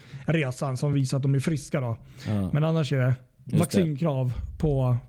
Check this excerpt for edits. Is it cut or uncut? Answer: uncut